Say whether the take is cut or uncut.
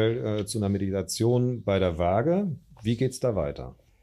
uncut